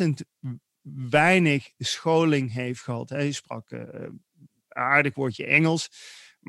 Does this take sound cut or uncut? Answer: uncut